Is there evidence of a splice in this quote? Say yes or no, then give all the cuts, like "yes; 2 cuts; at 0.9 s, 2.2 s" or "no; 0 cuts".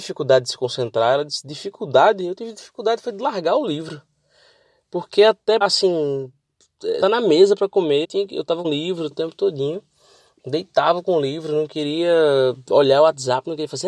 yes; 5 cuts; at 5.6 s, 7.0 s, 8.0 s, 8.6 s, 9.1 s